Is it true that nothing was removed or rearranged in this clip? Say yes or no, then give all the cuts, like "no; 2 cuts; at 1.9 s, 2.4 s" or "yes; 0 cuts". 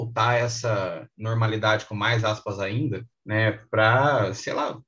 no; 1 cut; at 3.1 s